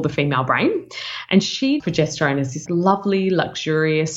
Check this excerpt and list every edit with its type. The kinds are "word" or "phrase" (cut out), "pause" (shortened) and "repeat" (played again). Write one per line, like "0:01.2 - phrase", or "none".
0:01.8 - word
0:02.7 - word